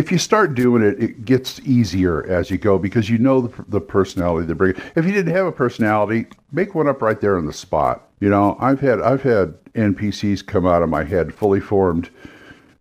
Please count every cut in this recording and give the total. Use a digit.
1